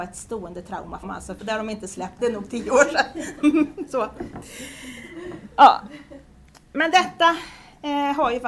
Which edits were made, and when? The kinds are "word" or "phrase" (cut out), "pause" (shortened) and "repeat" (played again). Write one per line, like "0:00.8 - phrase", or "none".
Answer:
0:01.0 - word
0:01.4 - word
0:02.2 - word
0:06.6 - pause

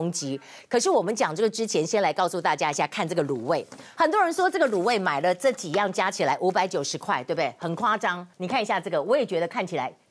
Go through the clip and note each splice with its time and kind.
0:08.3 - pause

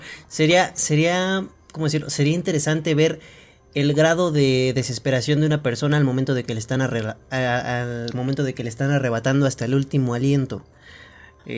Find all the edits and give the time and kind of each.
none

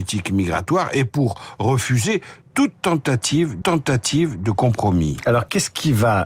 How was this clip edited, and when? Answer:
0:03.6 - repeat

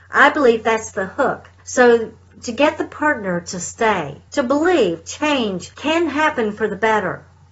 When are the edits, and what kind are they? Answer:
0:01.6 - pause
0:04.3 - pause
0:05.7 - pause

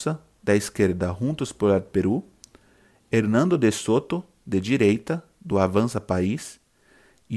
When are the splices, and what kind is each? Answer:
none

